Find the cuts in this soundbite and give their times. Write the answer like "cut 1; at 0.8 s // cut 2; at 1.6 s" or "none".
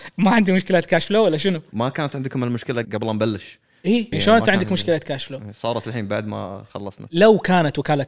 cut 1; at 2.8 s // cut 2; at 4.1 s